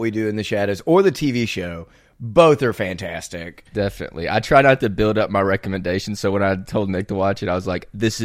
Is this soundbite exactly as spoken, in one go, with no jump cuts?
yes; 0 cuts

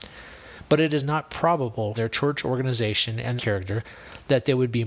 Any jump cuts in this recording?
yes; 2 cuts; at 2.0 s, 3.4 s

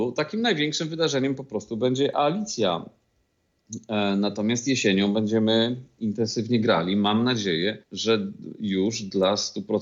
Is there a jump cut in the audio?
yes; 1 cut; at 7.8 s

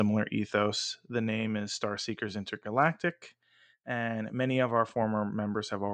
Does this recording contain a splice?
no; 0 cuts

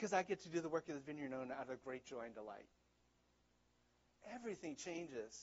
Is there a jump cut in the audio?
no; 0 cuts

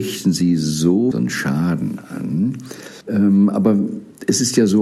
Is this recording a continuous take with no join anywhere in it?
no; 2 cuts; at 1.1 s, 3.0 s

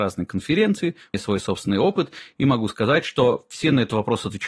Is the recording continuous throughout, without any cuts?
no; 1 cut; at 1.1 s

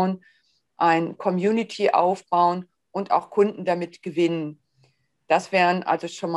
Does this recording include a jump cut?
no; 0 cuts

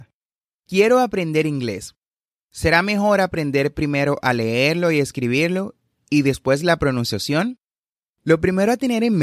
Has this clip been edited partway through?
no; 0 cuts

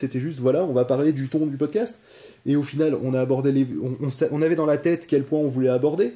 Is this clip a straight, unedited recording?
yes; 0 cuts

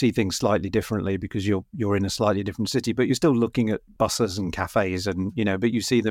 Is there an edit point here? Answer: no; 0 cuts

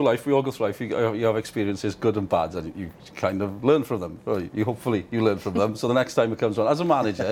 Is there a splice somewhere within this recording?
no; 0 cuts

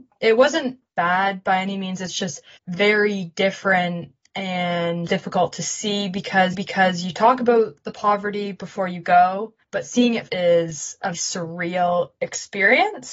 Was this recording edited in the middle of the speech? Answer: yes; 6 cuts; at 2.6 s, 5.1 s, 6.5 s, 9.6 s, 10.3 s, 11.1 s

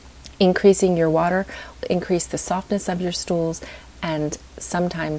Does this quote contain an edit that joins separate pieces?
yes; 1 cut; at 1.8 s

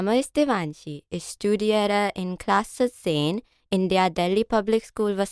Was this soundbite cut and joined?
no; 0 cuts

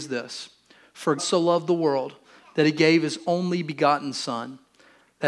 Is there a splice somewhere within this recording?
yes; 1 cut; at 1.2 s

